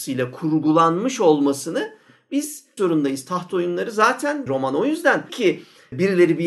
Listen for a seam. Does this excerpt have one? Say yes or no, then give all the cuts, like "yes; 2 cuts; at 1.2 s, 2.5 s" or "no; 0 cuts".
yes; 3 cuts; at 2.8 s, 4.5 s, 5.3 s